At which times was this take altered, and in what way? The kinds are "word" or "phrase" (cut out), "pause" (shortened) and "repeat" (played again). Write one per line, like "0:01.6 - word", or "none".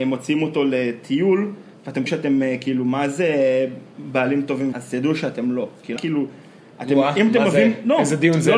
0:02.1 - word
0:04.7 - word
0:06.0 - word